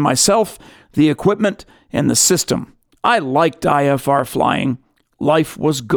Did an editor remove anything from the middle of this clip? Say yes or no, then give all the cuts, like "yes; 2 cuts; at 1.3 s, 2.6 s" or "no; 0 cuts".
no; 0 cuts